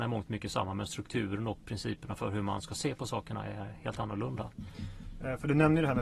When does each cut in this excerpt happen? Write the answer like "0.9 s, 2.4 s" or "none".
none